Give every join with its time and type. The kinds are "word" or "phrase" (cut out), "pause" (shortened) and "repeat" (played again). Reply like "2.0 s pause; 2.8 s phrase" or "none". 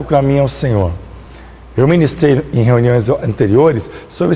none